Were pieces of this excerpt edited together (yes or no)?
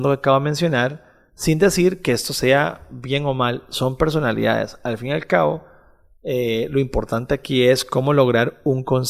no